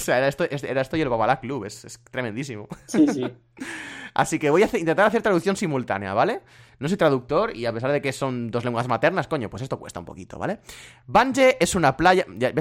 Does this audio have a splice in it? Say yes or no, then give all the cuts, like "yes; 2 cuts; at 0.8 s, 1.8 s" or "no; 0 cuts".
no; 0 cuts